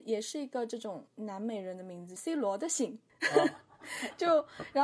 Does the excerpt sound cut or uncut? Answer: cut